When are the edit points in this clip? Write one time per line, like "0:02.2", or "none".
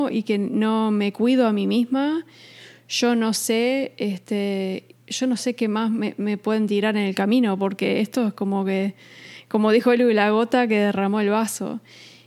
0:04.9